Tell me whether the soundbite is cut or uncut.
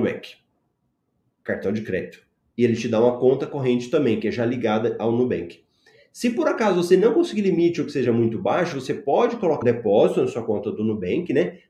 cut